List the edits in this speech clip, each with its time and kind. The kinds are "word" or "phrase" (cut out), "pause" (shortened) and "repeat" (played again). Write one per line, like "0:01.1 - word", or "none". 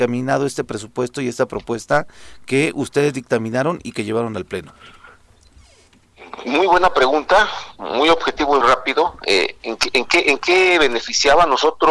0:08.6 - word

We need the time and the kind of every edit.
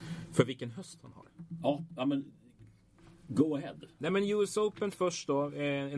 none

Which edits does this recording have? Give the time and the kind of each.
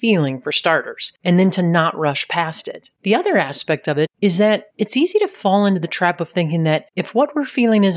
none

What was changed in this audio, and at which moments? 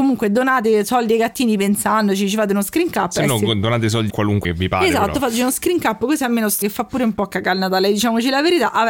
0:04.1 - word
0:04.4 - phrase
0:06.6 - word

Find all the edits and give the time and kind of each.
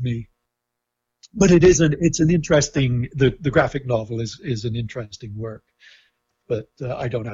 none

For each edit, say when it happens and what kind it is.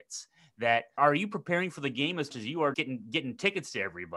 0:01.0 - word
0:02.3 - word
0:02.7 - word

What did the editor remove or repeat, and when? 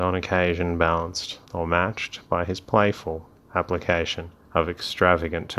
0:01.4 - pause
0:04.4 - pause

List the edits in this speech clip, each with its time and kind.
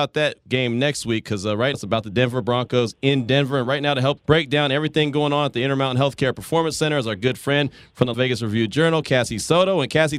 0:01.7 - word
0:04.2 - word
0:08.1 - word

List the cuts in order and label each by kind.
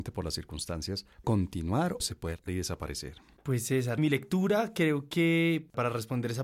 0:01.2 - word
0:02.0 - word
0:02.5 - word
0:04.0 - word

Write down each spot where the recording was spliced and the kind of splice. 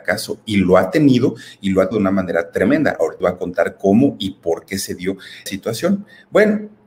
0:01.9 - word
0:03.2 - word
0:05.5 - word

